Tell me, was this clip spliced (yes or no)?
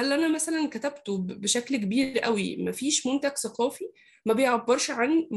no